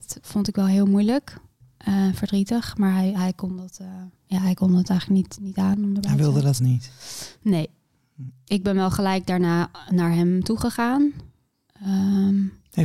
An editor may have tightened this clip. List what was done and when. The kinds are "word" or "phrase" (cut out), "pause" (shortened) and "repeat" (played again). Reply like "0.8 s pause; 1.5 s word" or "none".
4.2 s pause; 6.6 s word

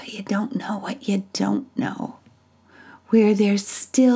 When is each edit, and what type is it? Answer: none

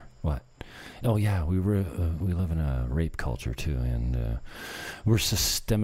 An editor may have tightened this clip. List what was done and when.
none

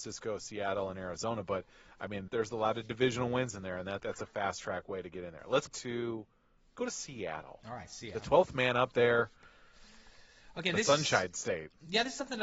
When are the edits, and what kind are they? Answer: 2.3 s word; 4.0 s word; 5.7 s word; 6.8 s word

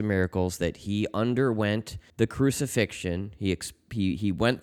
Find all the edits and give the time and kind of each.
2.1 s pause

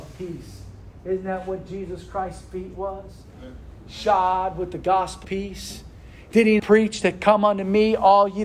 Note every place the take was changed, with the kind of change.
5.2 s word; 6.6 s word

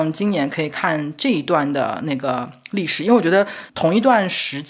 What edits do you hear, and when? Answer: 3.7 s word

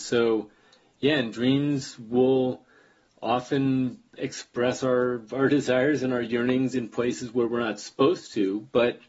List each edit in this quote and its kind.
none

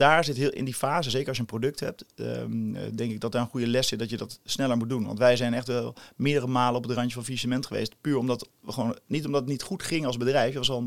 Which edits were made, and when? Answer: none

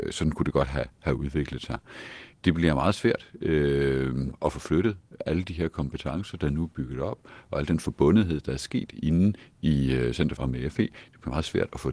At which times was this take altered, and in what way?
2.3 s pause; 10.4 s word

